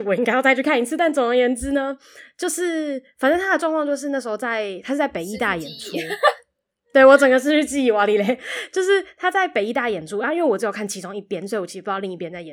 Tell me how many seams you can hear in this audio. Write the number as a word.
zero